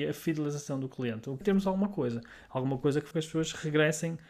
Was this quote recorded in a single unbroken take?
no; 2 cuts; at 1.4 s, 3.1 s

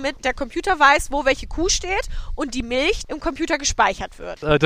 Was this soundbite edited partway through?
no; 0 cuts

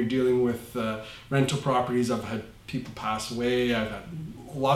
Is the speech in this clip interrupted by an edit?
no; 0 cuts

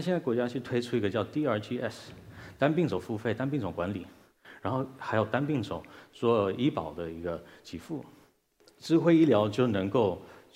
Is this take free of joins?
yes; 0 cuts

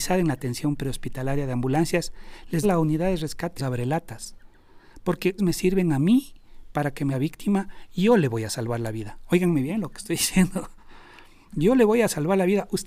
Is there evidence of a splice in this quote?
yes; 4 cuts; at 2.6 s, 3.6 s, 5.4 s, 7.1 s

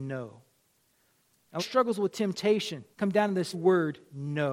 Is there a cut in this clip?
yes; 3 cuts; at 1.6 s, 2.9 s, 3.5 s

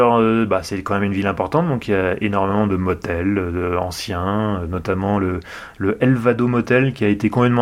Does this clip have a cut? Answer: no; 0 cuts

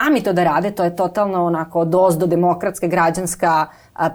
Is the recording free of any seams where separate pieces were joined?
yes; 0 cuts

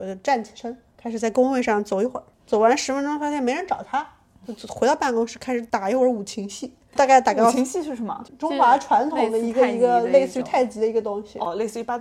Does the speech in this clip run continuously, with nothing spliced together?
yes; 0 cuts

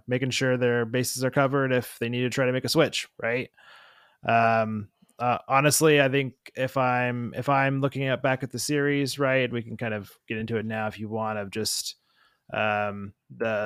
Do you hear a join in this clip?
no; 0 cuts

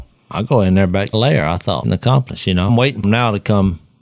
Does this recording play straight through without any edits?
no; 4 cuts; at 1.1 s, 1.8 s, 2.7 s, 3.0 s

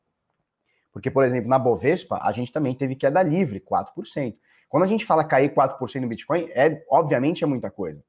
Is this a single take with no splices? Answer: yes; 0 cuts

